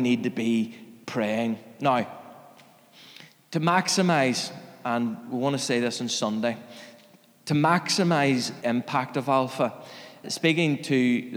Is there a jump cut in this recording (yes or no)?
yes